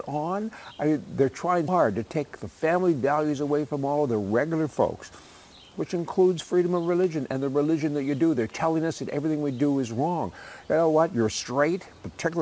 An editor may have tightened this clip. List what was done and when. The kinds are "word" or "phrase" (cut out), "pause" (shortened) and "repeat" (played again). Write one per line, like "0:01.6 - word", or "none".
0:01.7 - word